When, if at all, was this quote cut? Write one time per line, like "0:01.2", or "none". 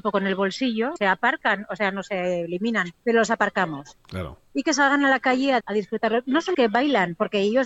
0:01.0
0:03.0
0:05.6
0:06.5